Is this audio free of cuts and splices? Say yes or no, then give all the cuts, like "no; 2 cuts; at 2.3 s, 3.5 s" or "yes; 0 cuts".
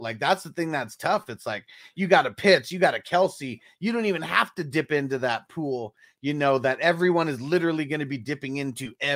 yes; 0 cuts